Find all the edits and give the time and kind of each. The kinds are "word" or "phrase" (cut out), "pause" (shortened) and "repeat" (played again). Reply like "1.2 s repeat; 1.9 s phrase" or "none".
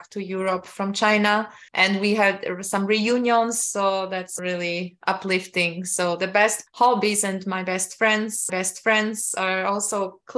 1.7 s pause; 4.4 s word; 6.7 s phrase; 8.5 s repeat

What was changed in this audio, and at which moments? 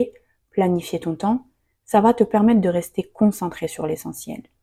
none

